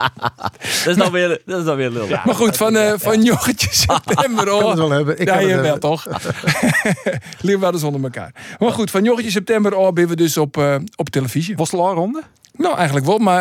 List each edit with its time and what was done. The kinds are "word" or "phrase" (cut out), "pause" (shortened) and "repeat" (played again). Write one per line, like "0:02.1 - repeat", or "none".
none